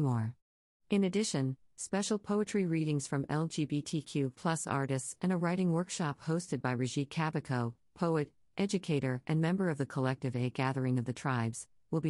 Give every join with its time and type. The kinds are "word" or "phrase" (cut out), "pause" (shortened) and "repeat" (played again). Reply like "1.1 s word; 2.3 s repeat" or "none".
none